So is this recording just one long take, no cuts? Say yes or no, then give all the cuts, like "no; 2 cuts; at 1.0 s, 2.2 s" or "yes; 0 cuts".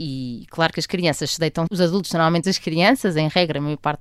no; 2 cuts; at 1.7 s, 2.4 s